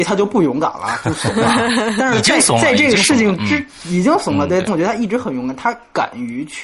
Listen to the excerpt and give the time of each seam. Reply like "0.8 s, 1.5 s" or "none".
4.7 s